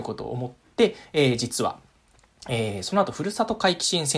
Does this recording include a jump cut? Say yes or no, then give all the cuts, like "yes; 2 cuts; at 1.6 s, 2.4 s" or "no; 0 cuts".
no; 0 cuts